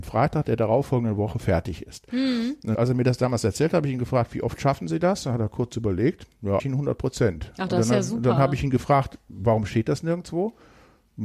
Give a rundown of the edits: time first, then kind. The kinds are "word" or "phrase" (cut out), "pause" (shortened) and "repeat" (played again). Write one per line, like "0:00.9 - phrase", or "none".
0:02.7 - word
0:06.6 - word